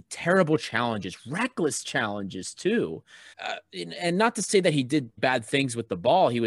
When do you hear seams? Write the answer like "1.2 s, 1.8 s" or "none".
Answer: 3.3 s, 5.2 s